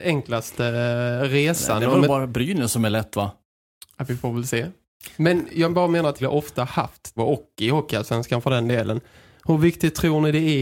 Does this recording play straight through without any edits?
no; 3 cuts; at 5.1 s, 6.2 s, 7.2 s

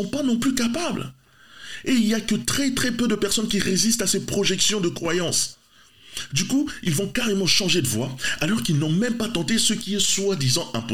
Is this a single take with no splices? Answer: yes; 0 cuts

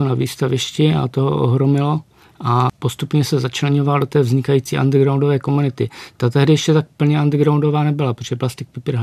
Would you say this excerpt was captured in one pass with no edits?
yes; 0 cuts

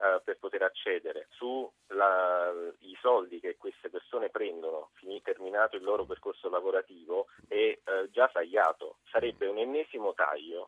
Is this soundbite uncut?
no; 3 cuts; at 1.3 s, 7.4 s, 8.3 s

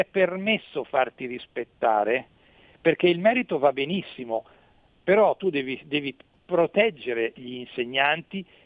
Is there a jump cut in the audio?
no; 0 cuts

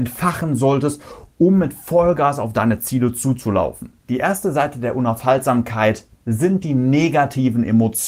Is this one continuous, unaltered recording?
no; 1 cut; at 4.0 s

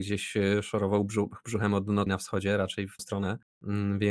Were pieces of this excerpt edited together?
yes; 2 cuts; at 2.1 s, 3.0 s

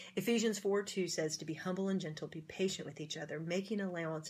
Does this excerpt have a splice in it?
no; 0 cuts

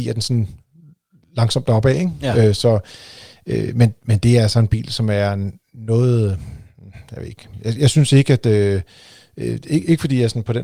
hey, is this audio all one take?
yes; 0 cuts

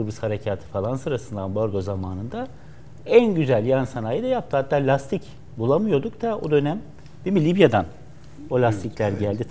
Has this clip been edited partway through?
no; 0 cuts

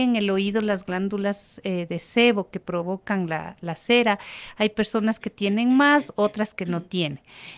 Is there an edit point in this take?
no; 0 cuts

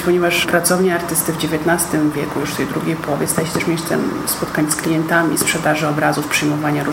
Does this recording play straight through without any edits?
yes; 0 cuts

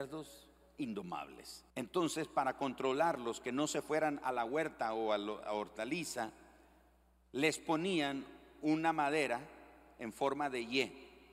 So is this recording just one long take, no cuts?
no; 1 cut; at 1.7 s

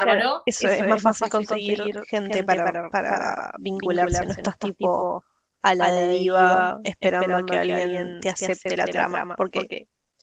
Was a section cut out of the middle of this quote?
no; 0 cuts

